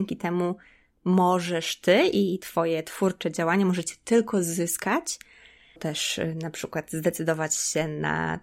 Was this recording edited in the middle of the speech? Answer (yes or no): yes